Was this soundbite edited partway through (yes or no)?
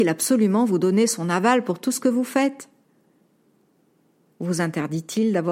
no